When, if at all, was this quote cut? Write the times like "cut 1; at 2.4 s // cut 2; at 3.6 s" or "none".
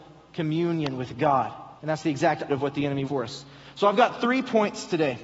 cut 1; at 1.8 s // cut 2; at 2.5 s // cut 3; at 3.0 s